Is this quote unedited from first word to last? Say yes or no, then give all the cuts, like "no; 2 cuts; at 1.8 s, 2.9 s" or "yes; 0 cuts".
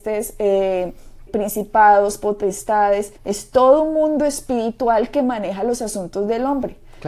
no; 2 cuts; at 1.3 s, 3.2 s